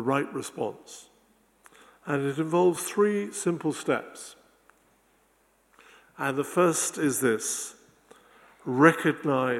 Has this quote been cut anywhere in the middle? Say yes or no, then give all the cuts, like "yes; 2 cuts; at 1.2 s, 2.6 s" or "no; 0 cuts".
no; 0 cuts